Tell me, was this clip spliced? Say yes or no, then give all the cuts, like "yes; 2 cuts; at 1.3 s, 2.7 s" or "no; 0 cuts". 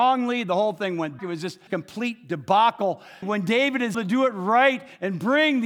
yes; 4 cuts; at 1.2 s, 1.7 s, 3.2 s, 3.9 s